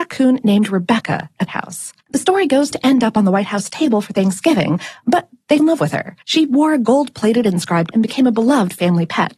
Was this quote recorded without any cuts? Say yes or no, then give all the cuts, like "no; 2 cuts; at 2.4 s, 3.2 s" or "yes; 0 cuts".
no; 6 cuts; at 1.5 s, 2.0 s, 2.7 s, 5.6 s, 6.2 s, 7.9 s